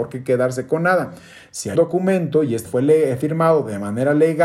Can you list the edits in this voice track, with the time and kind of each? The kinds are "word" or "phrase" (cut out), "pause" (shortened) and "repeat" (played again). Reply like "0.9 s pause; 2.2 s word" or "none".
1.8 s word; 2.7 s word